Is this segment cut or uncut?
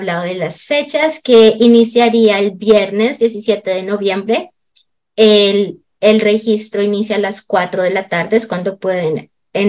uncut